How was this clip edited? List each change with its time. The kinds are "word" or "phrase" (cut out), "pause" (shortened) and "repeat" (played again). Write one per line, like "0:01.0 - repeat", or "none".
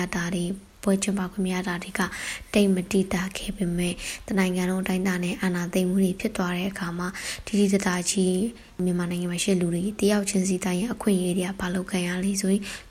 none